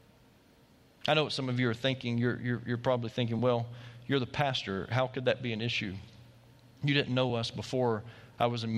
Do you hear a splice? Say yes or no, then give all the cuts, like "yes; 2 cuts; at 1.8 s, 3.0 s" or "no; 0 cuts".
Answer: no; 0 cuts